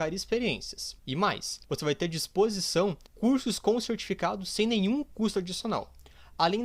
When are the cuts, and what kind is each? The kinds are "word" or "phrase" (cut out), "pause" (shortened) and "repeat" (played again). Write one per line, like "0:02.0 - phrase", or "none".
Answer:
0:01.0 - pause
0:01.6 - pause
0:03.1 - pause